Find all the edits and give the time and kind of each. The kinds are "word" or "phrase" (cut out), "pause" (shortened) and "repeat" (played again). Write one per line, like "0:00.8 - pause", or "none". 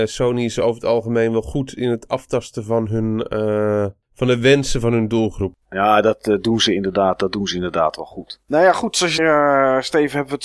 0:09.2 - phrase